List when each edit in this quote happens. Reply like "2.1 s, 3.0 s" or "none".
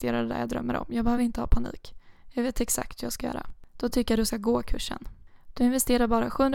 none